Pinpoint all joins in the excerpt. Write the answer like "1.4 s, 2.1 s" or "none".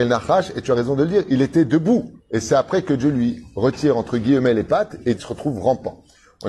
2.2 s, 5.2 s